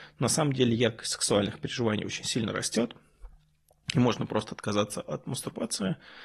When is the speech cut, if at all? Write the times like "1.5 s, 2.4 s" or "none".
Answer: none